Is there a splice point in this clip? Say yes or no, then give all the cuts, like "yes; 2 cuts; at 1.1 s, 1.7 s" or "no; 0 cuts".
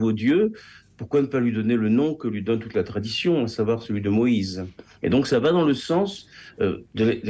no; 0 cuts